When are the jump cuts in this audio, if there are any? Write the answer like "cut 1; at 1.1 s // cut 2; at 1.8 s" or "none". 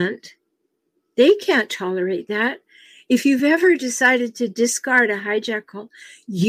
none